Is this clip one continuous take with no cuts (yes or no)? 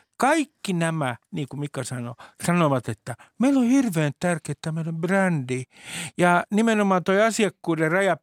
yes